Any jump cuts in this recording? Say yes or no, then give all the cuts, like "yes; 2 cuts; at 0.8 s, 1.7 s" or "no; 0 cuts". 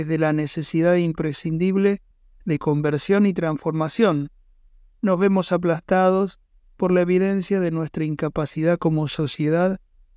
no; 0 cuts